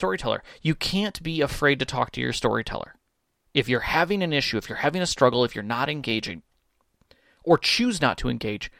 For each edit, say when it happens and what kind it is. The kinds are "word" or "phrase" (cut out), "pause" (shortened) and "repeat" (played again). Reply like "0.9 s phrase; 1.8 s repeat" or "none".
none